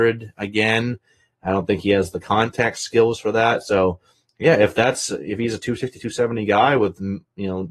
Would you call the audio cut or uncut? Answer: uncut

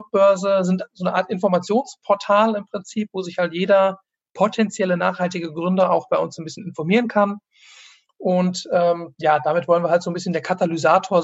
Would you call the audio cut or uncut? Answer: uncut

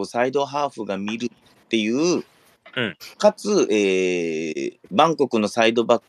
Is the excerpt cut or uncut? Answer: cut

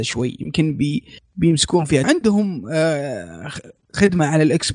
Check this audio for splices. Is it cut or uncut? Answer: cut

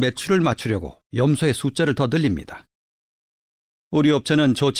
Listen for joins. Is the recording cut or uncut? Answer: uncut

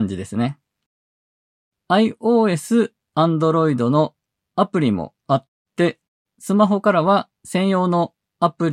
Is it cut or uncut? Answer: cut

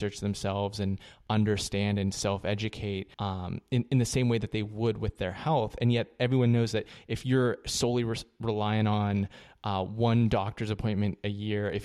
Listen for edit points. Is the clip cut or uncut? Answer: cut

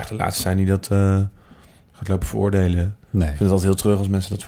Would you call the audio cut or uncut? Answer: uncut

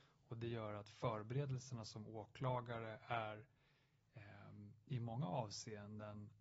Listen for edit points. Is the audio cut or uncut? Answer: uncut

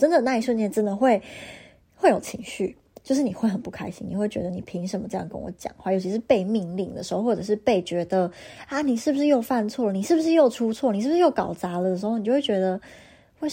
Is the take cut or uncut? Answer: uncut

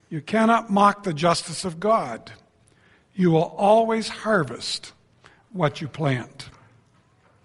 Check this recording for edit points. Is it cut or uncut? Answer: uncut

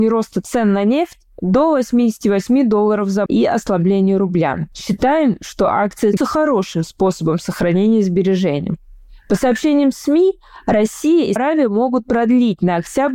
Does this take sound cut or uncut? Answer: cut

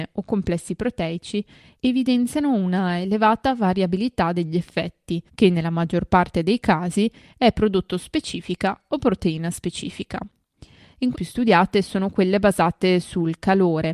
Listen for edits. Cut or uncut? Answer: cut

